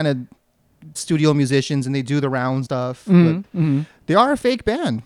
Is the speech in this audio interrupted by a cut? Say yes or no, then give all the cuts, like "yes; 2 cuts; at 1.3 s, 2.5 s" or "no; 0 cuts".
yes; 2 cuts; at 1.0 s, 2.7 s